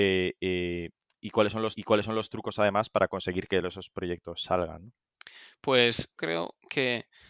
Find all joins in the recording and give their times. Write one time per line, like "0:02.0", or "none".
0:01.8
0:06.2